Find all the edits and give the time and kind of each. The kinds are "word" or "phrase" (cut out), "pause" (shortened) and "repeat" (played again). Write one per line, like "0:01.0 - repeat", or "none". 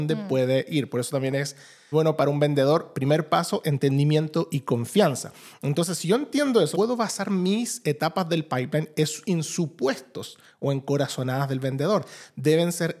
0:01.9 - word
0:06.7 - word